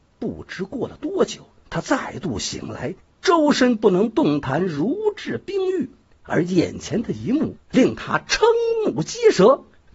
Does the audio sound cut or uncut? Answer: uncut